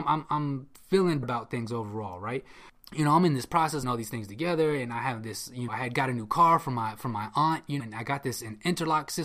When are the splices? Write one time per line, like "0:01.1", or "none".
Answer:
0:01.2
0:03.8
0:05.7
0:07.8